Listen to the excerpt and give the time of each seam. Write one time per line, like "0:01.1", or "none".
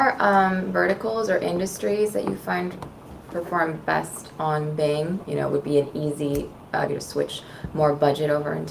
0:05.2
0:06.9